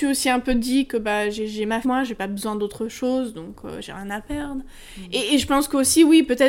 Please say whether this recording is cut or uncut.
cut